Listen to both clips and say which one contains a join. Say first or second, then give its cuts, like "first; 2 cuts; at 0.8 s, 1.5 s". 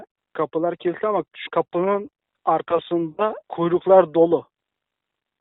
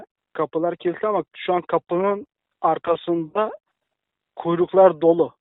first; 2 cuts; at 1.5 s, 3.4 s